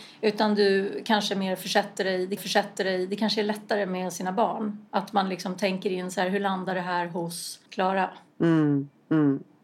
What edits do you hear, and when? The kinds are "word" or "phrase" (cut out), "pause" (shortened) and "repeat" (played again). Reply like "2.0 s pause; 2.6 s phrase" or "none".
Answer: 2.4 s repeat; 7.7 s pause

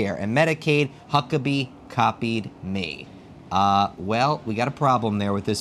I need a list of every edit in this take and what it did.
1.0 s pause

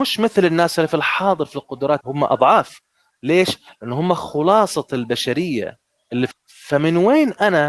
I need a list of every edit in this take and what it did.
2.0 s word; 6.3 s word

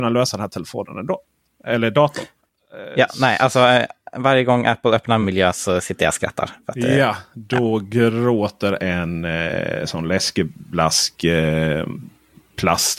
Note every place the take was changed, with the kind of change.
5.2 s phrase; 8.8 s phrase

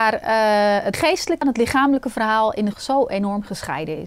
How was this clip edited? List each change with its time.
0.9 s word; 1.4 s word; 2.7 s word

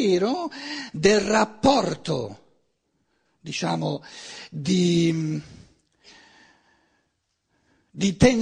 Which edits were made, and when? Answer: none

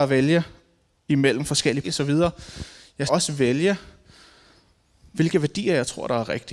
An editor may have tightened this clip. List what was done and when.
1.8 s phrase; 3.1 s word

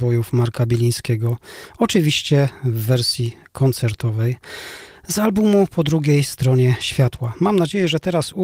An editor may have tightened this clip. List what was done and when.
none

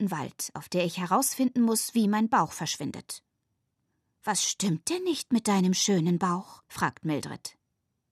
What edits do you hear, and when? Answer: 6.6 s pause

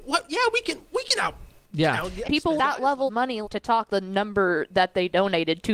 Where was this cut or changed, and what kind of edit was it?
2.2 s word; 2.6 s word; 3.1 s word; 3.4 s word; 3.9 s word

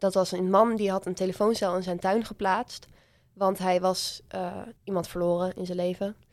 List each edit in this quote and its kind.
4.8 s pause

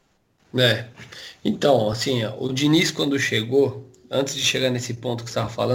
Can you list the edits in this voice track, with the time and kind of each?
none

